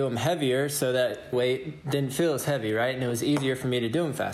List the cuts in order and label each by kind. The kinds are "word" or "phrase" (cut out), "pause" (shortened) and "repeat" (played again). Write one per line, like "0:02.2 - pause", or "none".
0:01.3 - phrase